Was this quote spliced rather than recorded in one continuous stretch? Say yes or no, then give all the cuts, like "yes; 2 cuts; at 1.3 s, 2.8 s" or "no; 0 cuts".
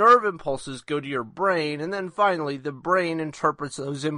no; 0 cuts